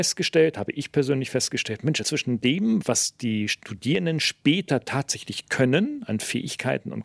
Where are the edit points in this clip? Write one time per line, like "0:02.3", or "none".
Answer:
0:02.0
0:02.8